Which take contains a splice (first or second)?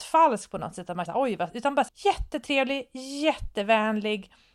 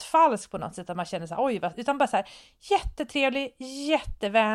first